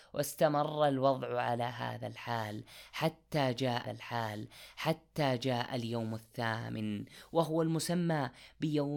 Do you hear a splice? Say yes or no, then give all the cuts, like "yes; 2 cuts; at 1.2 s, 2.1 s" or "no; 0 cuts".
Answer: yes; 1 cut; at 3.8 s